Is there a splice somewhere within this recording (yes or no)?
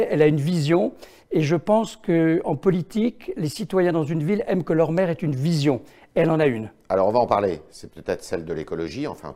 no